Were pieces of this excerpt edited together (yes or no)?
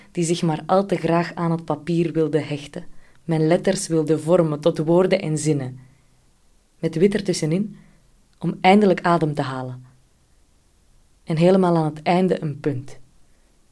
no